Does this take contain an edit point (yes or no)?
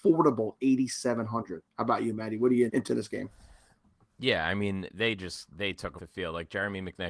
yes